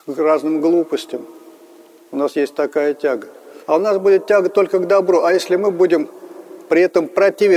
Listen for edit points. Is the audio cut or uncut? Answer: cut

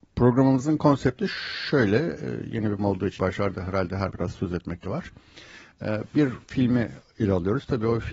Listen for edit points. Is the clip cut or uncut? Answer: cut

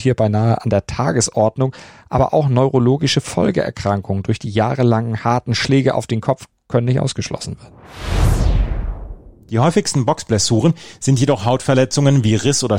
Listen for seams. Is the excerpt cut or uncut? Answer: uncut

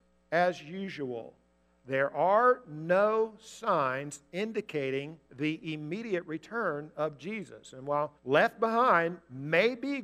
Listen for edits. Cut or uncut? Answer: cut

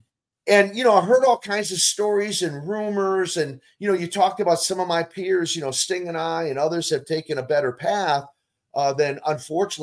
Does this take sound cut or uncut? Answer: uncut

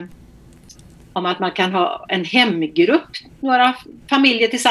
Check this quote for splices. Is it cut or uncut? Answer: uncut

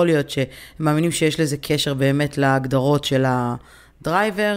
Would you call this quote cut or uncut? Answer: uncut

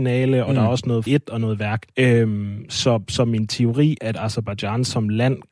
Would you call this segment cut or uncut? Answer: cut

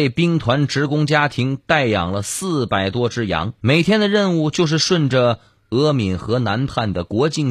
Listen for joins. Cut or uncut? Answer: cut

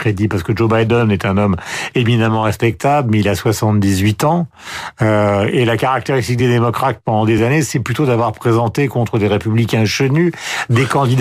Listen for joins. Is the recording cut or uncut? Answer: uncut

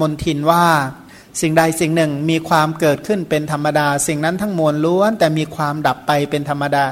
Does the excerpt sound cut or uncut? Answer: uncut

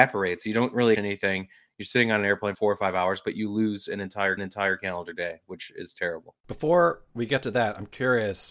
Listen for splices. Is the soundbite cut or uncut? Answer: cut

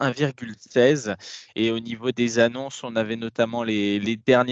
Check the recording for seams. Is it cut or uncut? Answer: cut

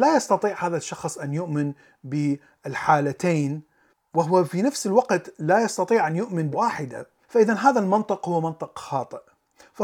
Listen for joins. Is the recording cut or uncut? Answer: cut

